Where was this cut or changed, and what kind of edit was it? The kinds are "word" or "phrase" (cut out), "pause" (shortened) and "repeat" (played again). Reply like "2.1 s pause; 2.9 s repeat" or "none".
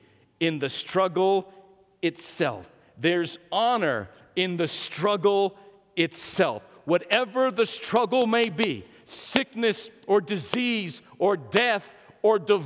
none